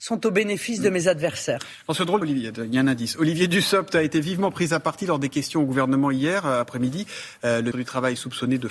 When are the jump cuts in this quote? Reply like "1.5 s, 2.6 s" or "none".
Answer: 2.2 s, 7.7 s